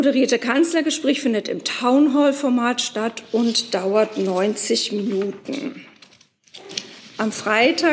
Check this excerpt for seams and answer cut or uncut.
uncut